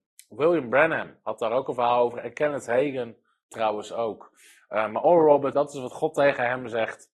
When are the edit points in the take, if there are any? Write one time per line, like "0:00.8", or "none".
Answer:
0:05.5